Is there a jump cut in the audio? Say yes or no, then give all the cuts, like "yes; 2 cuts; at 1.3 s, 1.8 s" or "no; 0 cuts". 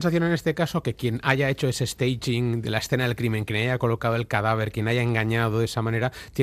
yes; 1 cut; at 2.6 s